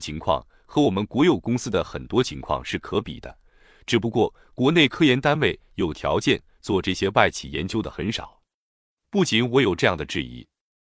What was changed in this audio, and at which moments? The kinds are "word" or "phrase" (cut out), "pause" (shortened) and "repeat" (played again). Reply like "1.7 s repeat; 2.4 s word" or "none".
none